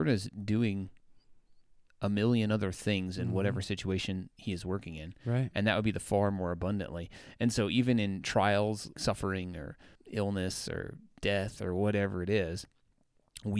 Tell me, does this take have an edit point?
yes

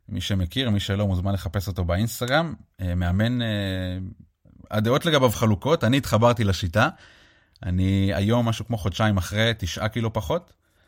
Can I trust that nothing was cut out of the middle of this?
yes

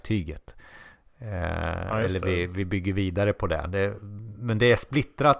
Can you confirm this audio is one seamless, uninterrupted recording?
yes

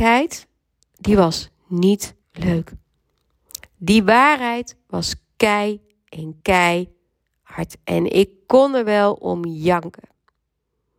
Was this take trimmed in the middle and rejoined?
yes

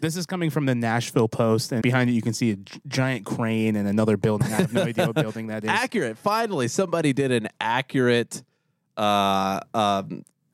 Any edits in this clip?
yes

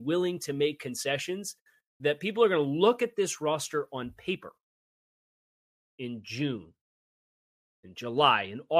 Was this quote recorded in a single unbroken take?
yes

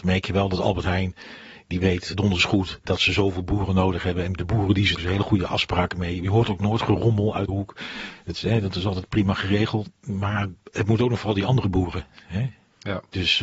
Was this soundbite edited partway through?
yes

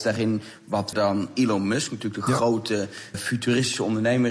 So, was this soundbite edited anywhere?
yes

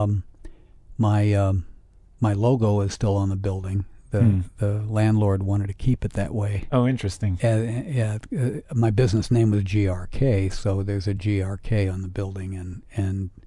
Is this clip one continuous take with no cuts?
yes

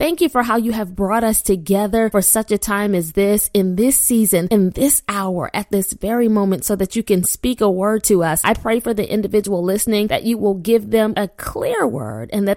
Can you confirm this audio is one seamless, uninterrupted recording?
yes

